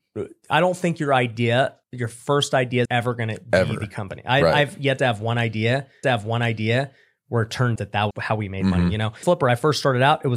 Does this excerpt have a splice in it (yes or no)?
yes